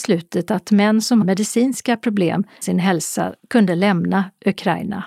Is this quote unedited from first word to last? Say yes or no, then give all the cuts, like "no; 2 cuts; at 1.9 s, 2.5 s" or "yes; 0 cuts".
no; 2 cuts; at 1.2 s, 2.6 s